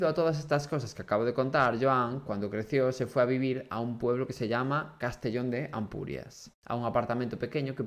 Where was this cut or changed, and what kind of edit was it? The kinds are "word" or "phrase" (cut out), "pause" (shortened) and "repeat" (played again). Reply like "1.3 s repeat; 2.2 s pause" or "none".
6.6 s pause